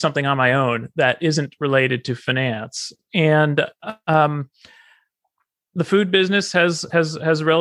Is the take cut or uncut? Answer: uncut